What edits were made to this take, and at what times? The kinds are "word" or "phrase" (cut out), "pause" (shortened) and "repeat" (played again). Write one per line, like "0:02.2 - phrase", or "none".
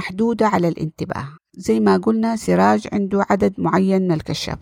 0:01.4 - pause